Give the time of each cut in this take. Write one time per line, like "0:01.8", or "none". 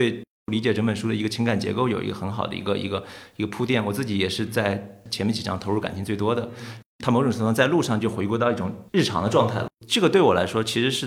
0:08.9